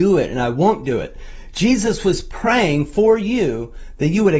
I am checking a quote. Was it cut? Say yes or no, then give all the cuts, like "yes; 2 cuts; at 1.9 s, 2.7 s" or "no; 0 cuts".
no; 0 cuts